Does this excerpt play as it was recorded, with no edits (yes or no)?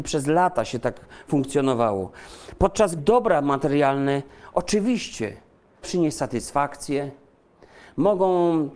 no